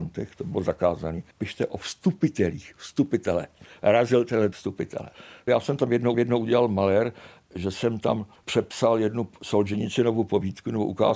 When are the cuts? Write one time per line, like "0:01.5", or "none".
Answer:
0:01.3
0:04.5
0:06.1
0:08.4